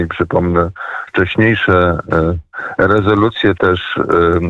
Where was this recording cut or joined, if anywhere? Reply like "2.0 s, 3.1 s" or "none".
1.1 s, 3.6 s